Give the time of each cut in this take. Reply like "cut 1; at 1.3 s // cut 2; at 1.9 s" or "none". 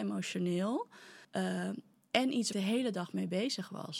cut 1; at 1.2 s // cut 2; at 2.5 s